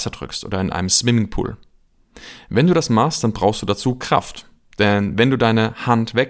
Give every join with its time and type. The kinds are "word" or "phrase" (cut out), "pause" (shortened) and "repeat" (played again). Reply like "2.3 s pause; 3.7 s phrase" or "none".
none